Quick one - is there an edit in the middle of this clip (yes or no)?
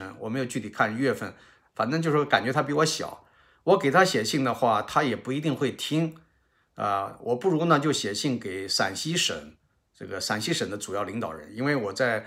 no